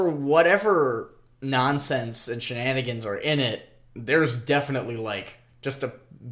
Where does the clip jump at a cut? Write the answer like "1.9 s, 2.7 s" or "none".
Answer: none